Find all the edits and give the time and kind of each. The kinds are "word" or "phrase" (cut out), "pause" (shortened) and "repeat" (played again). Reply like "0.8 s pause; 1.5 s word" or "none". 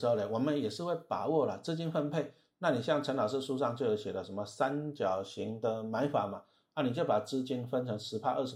none

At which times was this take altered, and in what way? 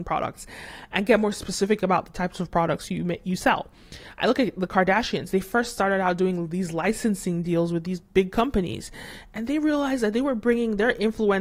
none

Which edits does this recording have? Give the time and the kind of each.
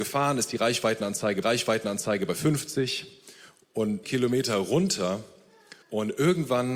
1.4 s repeat; 4.0 s phrase; 5.8 s pause

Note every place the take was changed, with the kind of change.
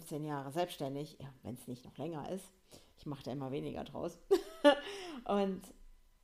none

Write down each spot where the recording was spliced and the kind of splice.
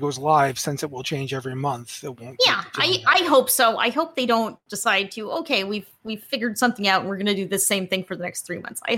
none

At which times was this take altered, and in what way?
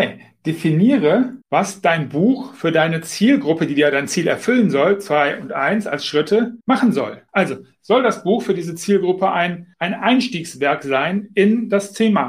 1.4 s pause; 6.6 s pause; 7.3 s pause; 9.7 s pause

